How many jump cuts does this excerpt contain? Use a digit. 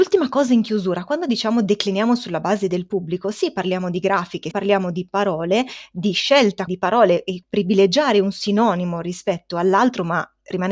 3